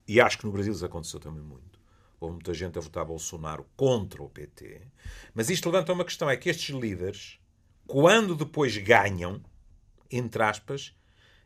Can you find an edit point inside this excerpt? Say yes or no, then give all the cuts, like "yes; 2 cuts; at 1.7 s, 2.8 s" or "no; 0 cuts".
no; 0 cuts